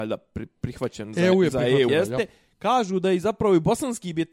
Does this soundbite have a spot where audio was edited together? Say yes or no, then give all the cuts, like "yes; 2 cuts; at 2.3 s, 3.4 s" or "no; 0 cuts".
yes; 1 cut; at 1.9 s